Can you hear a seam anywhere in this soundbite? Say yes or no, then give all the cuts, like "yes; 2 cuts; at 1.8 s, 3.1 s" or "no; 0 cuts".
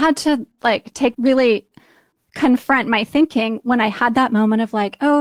yes; 1 cut; at 1.1 s